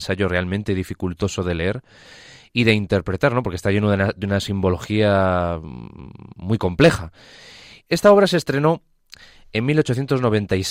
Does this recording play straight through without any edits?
yes; 0 cuts

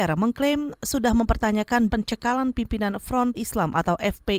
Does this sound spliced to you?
yes; 2 cuts; at 1.9 s, 3.3 s

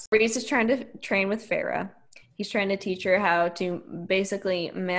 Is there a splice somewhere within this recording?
no; 0 cuts

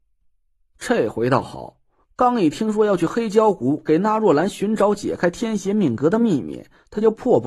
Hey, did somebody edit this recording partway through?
no; 0 cuts

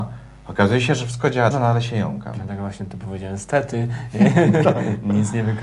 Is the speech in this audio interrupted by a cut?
yes; 1 cut; at 1.5 s

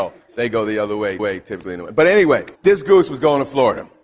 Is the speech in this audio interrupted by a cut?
yes; 2 cuts; at 1.2 s, 2.6 s

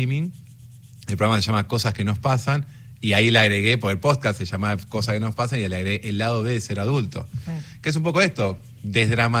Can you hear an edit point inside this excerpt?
no; 0 cuts

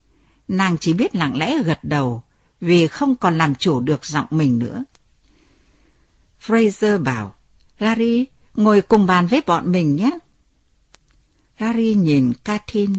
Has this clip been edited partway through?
no; 0 cuts

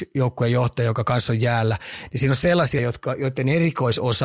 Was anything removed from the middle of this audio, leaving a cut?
yes; 1 cut; at 2.8 s

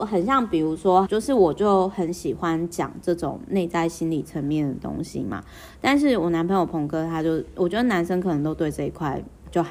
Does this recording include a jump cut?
yes; 1 cut; at 1.1 s

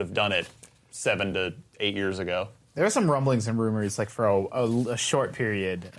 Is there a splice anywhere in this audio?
no; 0 cuts

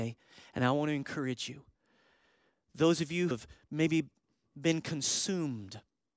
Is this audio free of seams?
no; 1 cut; at 3.3 s

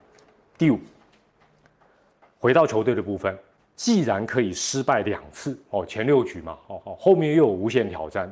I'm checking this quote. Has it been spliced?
yes; 2 cuts; at 3.6 s, 6.8 s

